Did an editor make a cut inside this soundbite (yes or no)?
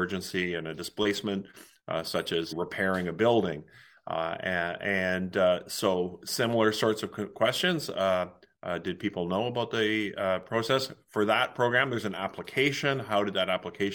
yes